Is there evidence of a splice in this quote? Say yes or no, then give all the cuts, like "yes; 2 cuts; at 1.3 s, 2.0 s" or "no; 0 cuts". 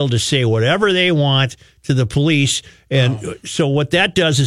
no; 0 cuts